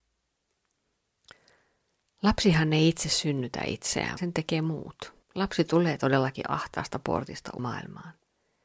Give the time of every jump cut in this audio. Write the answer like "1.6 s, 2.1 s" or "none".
4.2 s, 5.2 s, 7.6 s